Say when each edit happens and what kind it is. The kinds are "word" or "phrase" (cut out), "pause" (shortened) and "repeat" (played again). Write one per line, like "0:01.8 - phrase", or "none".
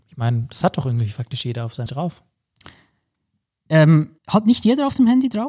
0:01.9 - word
0:04.2 - pause